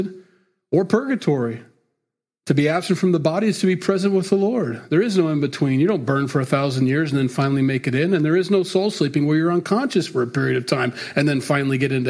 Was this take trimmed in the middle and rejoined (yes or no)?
no